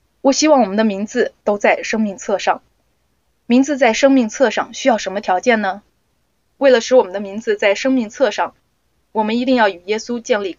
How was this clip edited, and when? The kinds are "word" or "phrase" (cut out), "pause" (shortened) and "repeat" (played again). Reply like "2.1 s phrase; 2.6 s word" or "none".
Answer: none